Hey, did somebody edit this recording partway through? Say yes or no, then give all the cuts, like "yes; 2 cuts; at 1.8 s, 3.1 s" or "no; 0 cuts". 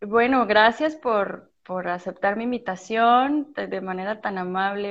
no; 0 cuts